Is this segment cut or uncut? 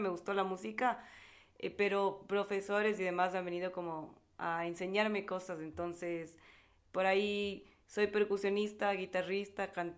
uncut